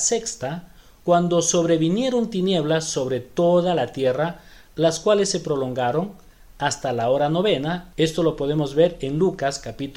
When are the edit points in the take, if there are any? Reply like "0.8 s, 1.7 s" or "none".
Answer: none